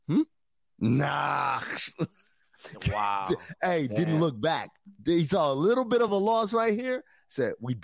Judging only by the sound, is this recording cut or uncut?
uncut